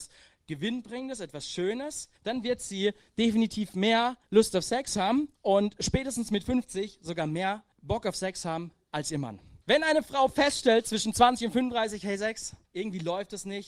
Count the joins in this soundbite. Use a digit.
6